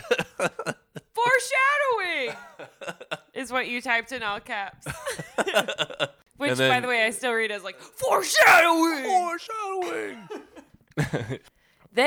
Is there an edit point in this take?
no; 0 cuts

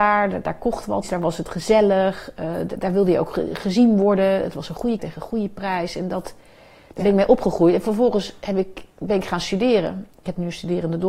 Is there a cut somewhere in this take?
yes; 3 cuts; at 1.0 s, 5.0 s, 8.9 s

